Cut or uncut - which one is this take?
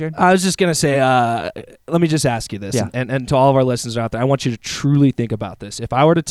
uncut